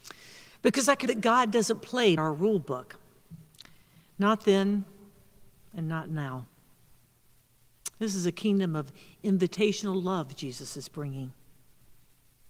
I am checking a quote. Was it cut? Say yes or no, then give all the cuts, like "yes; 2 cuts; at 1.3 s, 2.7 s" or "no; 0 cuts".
yes; 2 cuts; at 1.1 s, 2.2 s